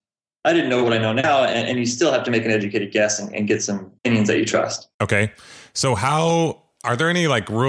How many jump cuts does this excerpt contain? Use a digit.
2